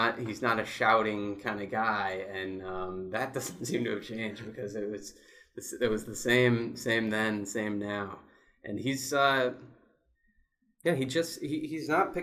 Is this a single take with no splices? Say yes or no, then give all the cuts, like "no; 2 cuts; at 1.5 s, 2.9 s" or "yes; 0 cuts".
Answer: yes; 0 cuts